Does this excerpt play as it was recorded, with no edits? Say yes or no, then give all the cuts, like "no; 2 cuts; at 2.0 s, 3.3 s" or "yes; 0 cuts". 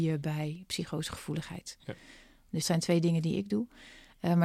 no; 1 cut; at 2.6 s